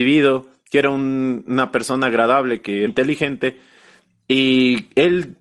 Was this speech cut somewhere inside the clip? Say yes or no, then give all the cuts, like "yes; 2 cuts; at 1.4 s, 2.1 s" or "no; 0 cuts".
yes; 1 cut; at 2.9 s